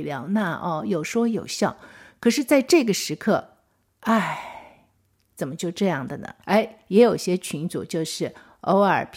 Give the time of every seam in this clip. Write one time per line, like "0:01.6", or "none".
0:06.4